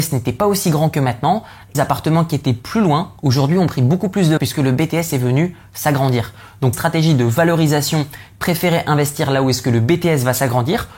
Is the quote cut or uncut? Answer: cut